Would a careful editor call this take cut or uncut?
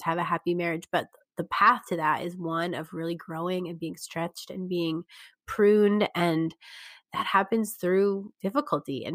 uncut